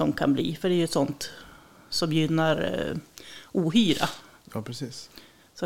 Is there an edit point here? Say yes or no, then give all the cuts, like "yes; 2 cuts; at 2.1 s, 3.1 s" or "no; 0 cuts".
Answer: no; 0 cuts